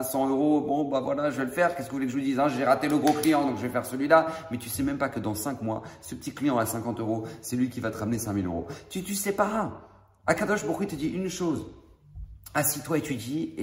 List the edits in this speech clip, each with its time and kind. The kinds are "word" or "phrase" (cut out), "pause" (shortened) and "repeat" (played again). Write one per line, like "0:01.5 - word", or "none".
none